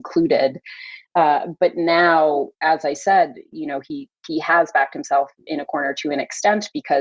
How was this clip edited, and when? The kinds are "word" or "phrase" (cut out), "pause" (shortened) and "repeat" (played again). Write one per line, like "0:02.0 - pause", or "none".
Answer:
none